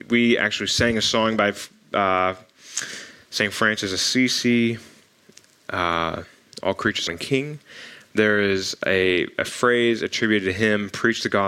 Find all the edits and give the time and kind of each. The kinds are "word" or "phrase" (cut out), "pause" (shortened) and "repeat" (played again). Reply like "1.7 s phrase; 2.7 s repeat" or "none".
7.1 s phrase